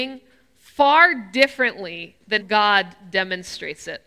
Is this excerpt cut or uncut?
cut